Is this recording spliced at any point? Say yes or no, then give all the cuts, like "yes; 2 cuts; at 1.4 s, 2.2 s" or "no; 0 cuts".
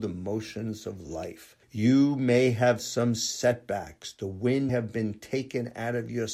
yes; 3 cuts; at 1.6 s, 2.8 s, 4.7 s